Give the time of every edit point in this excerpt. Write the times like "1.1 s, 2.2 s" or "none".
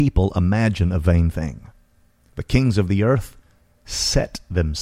none